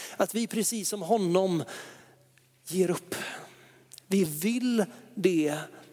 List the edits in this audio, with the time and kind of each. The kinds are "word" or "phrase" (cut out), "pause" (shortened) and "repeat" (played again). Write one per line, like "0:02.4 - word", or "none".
none